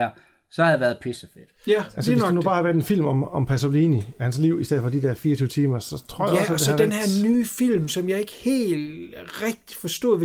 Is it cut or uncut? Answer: uncut